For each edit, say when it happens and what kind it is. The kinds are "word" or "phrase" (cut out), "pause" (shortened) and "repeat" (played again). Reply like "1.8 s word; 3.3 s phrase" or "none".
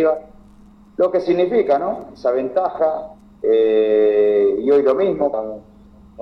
5.3 s word